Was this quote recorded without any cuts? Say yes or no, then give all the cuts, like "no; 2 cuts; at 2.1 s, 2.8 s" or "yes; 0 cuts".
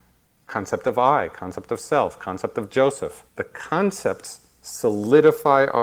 no; 1 cut; at 3.3 s